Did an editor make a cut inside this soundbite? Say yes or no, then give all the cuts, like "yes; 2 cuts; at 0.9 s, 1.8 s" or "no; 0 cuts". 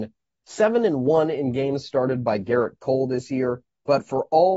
no; 0 cuts